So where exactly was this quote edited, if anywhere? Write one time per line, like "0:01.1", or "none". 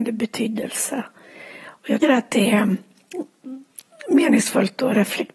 0:02.0